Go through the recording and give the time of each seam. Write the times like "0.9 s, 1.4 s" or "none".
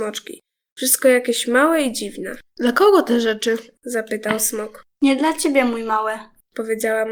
2.5 s

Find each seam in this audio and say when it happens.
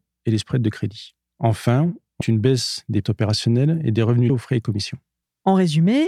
2.2 s, 3.0 s, 4.3 s

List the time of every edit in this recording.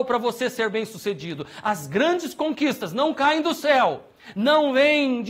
none

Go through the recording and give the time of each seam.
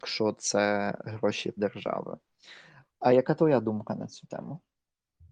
1.6 s

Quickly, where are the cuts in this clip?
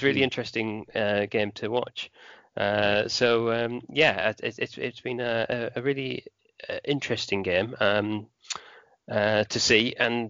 none

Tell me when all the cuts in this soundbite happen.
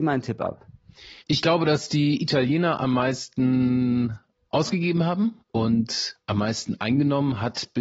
1.2 s, 4.3 s, 5.4 s

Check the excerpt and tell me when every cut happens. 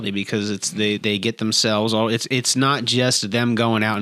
1.0 s

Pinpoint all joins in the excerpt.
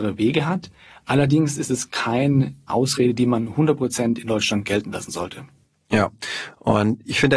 2.7 s

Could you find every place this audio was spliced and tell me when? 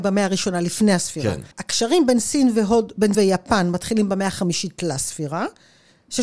1.5 s, 3.1 s

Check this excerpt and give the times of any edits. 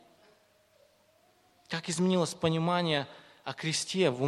none

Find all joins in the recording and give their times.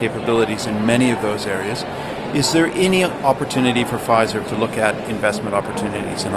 4.4 s

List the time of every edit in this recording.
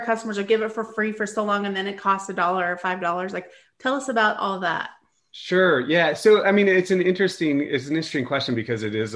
none

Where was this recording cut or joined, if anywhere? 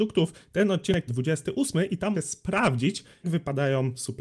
1.1 s, 2.1 s, 3.2 s

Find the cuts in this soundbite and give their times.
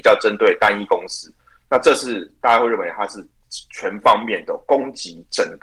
none

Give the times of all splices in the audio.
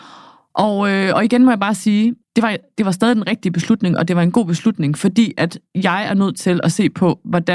2.2 s

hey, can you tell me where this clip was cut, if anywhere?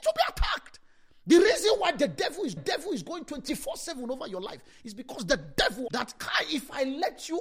2.6 s, 5.9 s

